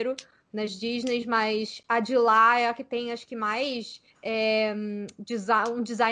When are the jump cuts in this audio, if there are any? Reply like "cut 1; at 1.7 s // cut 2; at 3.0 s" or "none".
cut 1; at 4.1 s

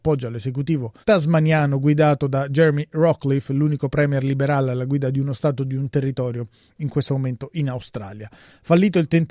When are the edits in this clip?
cut 1; at 1.0 s

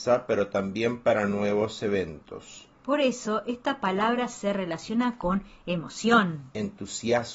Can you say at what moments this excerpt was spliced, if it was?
cut 1; at 2.8 s

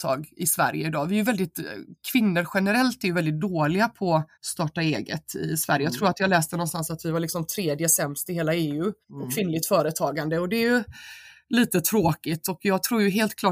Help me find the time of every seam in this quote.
cut 1; at 4.3 s // cut 2; at 9.0 s

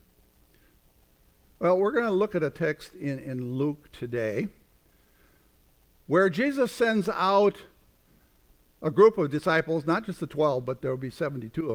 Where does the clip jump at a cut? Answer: none

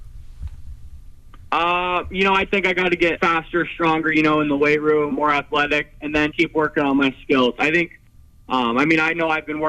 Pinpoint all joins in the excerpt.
cut 1; at 2.5 s // cut 2; at 3.2 s // cut 3; at 5.1 s // cut 4; at 6.3 s

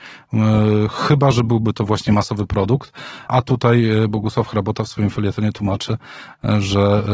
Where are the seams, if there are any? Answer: cut 1; at 3.3 s

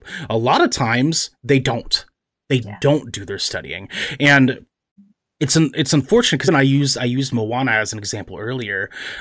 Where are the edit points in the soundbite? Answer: cut 1; at 2.6 s // cut 2; at 6.5 s

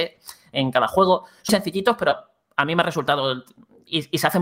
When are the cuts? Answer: cut 1; at 1.5 s

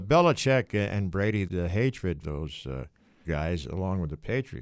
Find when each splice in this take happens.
cut 1; at 1.5 s // cut 2; at 2.2 s // cut 3; at 3.2 s

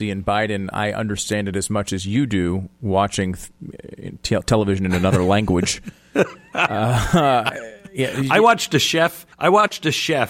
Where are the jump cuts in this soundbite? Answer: cut 1; at 9.3 s

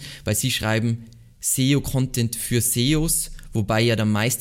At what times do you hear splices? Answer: none

